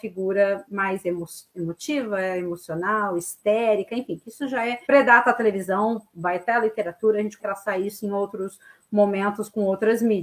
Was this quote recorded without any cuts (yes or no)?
no